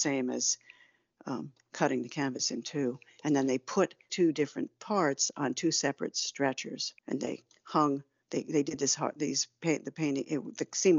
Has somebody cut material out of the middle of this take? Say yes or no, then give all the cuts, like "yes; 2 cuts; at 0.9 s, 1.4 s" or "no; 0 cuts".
yes; 2 cuts; at 4.1 s, 7.0 s